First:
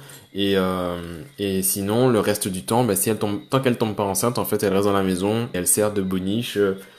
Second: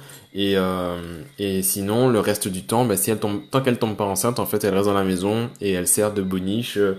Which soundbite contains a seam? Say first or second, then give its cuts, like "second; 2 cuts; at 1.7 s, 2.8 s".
first; 1 cut; at 5.5 s